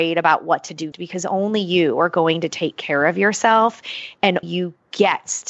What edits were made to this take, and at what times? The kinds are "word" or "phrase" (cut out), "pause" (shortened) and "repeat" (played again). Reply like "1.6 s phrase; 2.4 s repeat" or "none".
0.9 s word; 4.4 s word